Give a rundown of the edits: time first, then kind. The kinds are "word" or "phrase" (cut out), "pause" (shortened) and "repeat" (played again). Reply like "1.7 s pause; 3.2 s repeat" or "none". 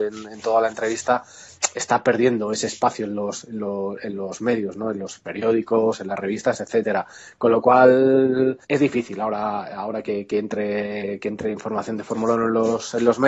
8.6 s pause